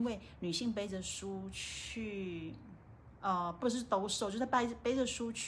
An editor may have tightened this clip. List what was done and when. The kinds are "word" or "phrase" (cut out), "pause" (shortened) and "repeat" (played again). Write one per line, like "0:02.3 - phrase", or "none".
none